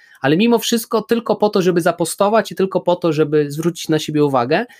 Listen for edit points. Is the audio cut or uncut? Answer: uncut